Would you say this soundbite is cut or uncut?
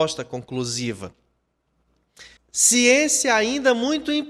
cut